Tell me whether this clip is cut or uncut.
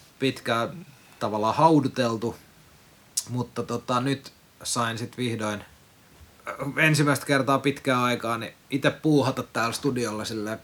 uncut